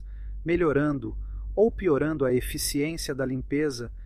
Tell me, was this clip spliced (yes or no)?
no